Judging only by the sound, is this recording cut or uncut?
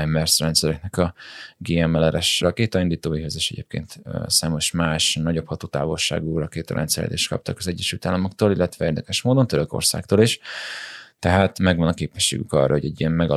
uncut